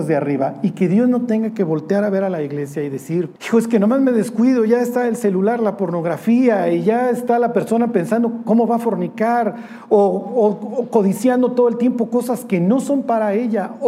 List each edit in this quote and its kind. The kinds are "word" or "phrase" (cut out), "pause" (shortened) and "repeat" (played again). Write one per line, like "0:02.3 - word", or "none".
0:03.4 - pause